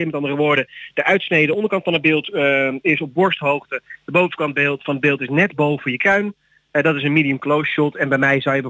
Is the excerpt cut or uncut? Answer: uncut